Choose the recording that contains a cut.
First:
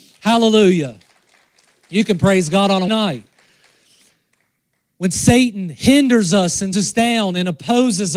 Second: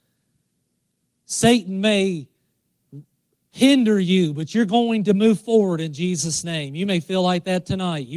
first; 2 cuts; at 2.9 s, 6.7 s

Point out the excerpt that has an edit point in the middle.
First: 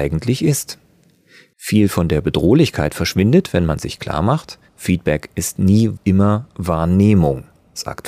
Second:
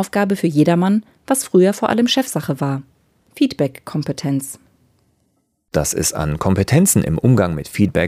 first; 2 cuts; at 4.7 s, 6.0 s

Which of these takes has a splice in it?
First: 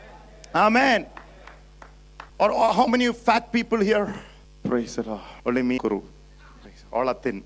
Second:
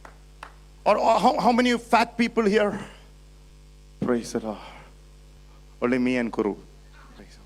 first; 5 cuts; at 2.3 s, 2.9 s, 4.4 s, 5.4 s, 5.8 s

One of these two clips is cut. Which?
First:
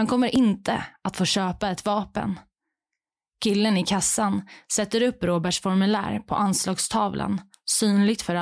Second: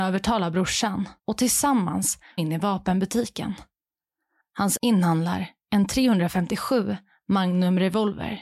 second; 3 cuts; at 1.2 s, 2.4 s, 4.8 s

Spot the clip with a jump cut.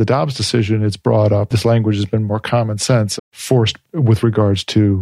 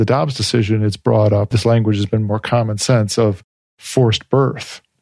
first; 2 cuts; at 3.2 s, 3.8 s

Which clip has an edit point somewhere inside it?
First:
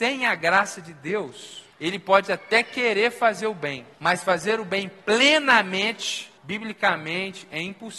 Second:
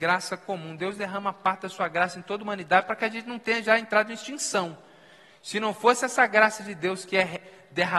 first; 3 cuts; at 1.7 s, 3.9 s, 6.4 s

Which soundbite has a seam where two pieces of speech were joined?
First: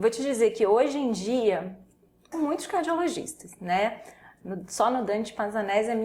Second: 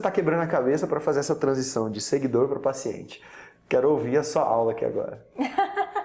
first; 1 cut; at 2.3 s

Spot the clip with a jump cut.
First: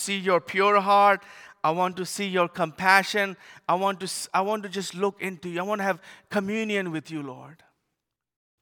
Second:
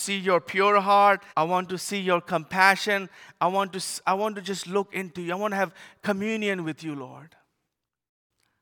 second; 1 cut; at 1.3 s

